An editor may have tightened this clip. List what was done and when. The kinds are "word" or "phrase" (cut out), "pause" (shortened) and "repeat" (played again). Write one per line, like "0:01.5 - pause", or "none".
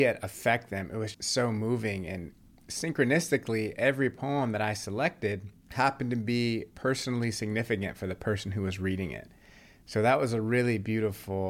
0:01.1 - word